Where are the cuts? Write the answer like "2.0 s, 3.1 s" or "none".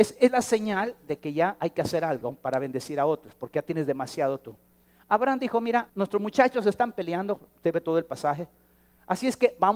5.9 s